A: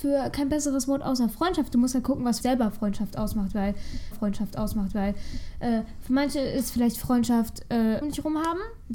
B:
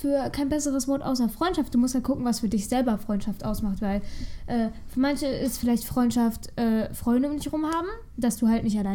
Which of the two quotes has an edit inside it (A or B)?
A